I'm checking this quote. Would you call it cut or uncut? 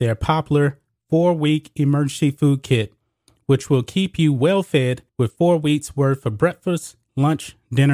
cut